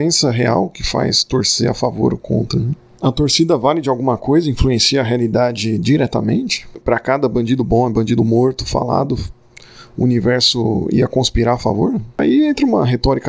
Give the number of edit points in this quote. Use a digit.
0